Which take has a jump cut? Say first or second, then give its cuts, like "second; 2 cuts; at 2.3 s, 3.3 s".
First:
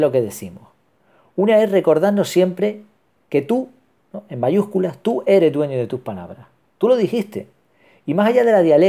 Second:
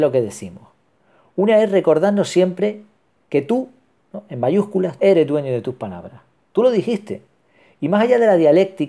second; 1 cut; at 5.0 s